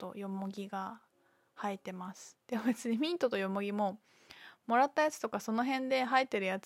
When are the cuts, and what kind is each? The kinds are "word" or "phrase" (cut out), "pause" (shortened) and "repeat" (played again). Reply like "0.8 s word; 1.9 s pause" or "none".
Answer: none